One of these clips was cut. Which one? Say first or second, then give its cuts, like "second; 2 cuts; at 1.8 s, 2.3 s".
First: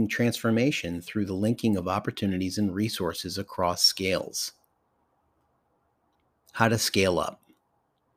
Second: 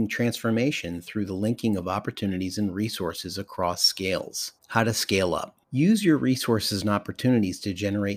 second; 2 cuts; at 4.6 s, 5.6 s